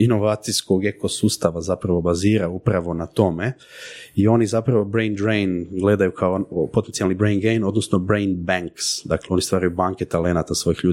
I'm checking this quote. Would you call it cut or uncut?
uncut